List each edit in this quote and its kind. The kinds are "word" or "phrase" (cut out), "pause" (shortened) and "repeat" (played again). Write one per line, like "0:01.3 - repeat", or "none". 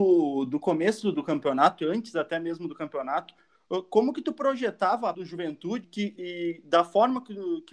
0:05.1 - word
0:05.8 - word
0:06.2 - word